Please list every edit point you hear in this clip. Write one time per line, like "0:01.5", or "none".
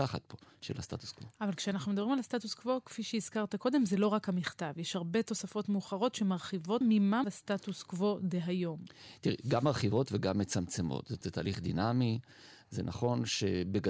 0:06.8
0:07.2
0:11.2